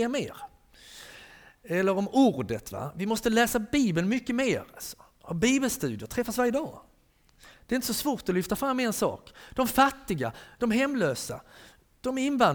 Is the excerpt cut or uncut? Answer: uncut